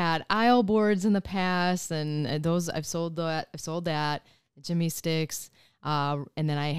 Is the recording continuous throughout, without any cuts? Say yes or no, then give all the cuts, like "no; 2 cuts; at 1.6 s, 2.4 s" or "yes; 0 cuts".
yes; 0 cuts